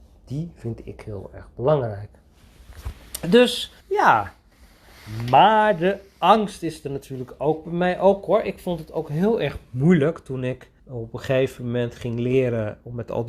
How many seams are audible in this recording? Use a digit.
2